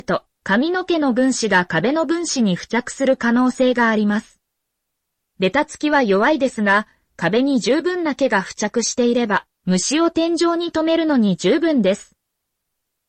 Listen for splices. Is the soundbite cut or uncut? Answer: uncut